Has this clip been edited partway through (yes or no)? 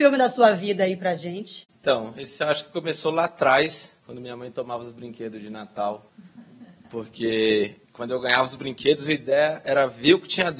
no